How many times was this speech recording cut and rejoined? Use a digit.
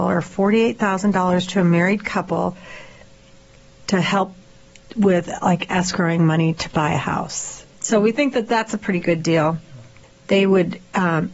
0